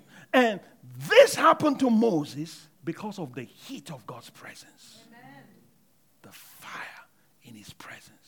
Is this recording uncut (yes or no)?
no